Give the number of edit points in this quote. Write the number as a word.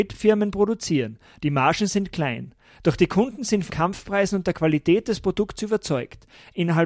one